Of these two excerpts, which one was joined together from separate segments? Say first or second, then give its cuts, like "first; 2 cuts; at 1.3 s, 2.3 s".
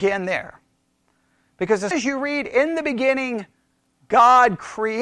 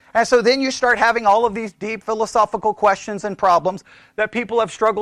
first; 1 cut; at 1.9 s